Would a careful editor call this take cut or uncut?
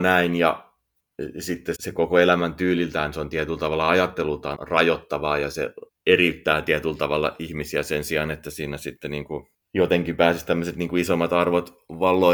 cut